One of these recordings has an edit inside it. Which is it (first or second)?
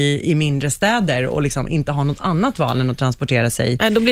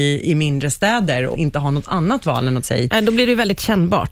second